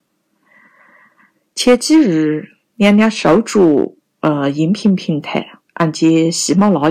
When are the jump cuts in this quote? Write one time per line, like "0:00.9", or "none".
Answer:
0:05.7